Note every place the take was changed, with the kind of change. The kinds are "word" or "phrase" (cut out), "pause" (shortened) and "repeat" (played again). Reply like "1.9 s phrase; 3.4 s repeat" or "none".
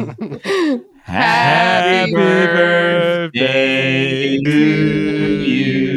4.4 s word